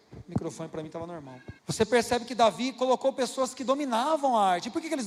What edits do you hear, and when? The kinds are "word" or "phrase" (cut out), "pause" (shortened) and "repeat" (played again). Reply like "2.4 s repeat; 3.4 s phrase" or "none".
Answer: 1.6 s pause